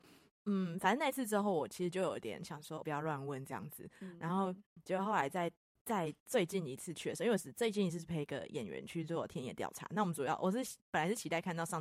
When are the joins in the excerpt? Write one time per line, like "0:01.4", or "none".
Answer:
0:02.8

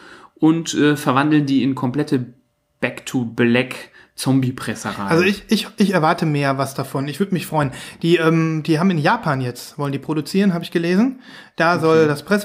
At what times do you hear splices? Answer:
none

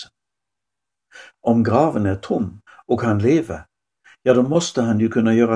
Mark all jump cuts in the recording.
0:02.7

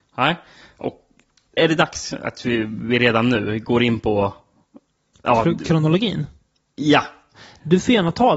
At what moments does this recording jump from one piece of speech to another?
0:01.6

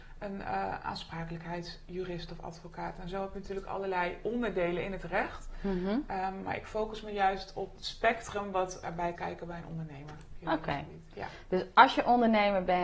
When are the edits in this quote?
0:07.8
0:09.2

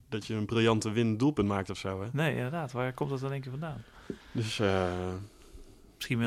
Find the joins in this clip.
0:04.2

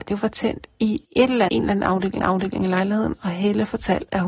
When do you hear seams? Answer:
0:01.0
0:01.5
0:02.2

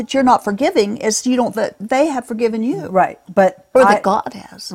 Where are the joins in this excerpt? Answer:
0:01.5
0:03.7

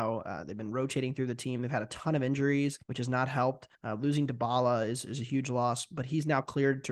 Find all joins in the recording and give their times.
0:02.8
0:03.7

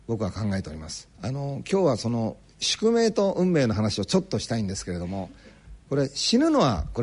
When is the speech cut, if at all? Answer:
0:01.1

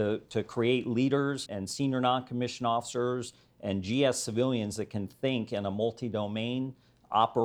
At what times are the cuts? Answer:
0:01.5

